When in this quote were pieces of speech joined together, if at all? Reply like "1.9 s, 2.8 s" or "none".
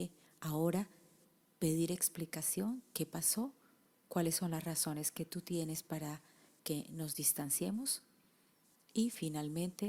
none